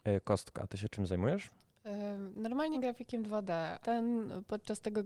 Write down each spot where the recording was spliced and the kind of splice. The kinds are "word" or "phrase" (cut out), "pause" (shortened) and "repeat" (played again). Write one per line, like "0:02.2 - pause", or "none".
0:02.7 - word
0:03.8 - word